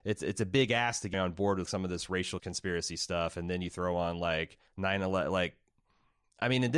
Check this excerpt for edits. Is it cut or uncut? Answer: cut